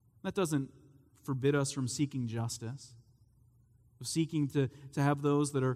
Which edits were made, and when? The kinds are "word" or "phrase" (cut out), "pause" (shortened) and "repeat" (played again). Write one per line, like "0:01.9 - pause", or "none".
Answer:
none

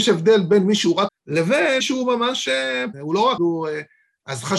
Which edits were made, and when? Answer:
0:01.1 - word
0:01.8 - word
0:02.9 - word
0:03.4 - word

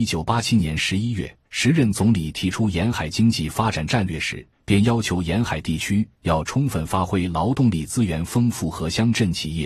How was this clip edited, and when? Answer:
0:01.5 - pause
0:04.5 - pause

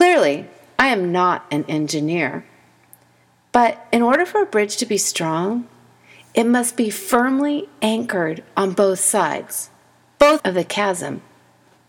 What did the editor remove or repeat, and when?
0:10.4 - word

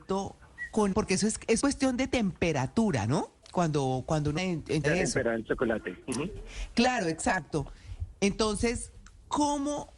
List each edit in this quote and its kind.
0:00.9 - word
0:01.6 - word
0:04.4 - word
0:04.8 - word

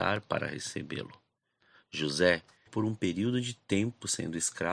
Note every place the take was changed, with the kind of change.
0:02.7 - word

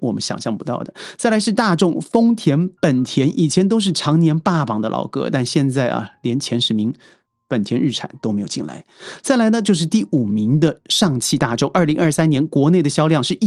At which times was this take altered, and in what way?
none

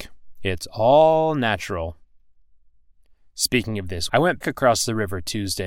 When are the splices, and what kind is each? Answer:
0:04.1 - word
0:04.4 - word

